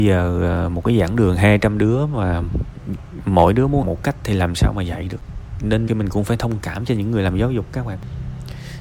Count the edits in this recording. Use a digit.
2